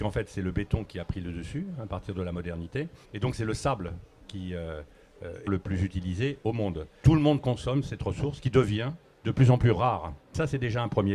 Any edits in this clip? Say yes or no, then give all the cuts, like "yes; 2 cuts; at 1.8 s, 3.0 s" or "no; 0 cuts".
yes; 2 cuts; at 3.0 s, 5.5 s